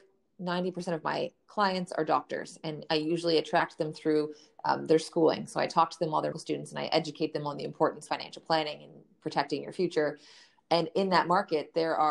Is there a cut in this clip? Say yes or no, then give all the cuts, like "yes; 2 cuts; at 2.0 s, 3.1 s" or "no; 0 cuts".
yes; 2 cuts; at 6.3 s, 8.1 s